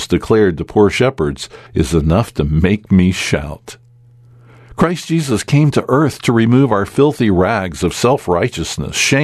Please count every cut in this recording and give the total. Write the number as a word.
one